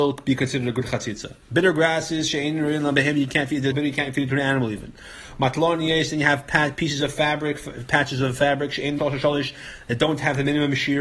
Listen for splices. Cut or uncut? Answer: cut